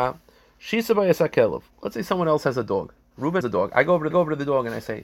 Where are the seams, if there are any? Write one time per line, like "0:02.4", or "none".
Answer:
0:01.7
0:03.4
0:04.1